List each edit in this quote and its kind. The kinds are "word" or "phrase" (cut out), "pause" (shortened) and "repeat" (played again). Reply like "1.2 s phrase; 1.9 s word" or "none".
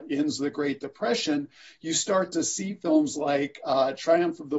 none